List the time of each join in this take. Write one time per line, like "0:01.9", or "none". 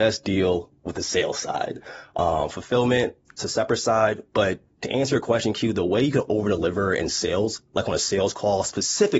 none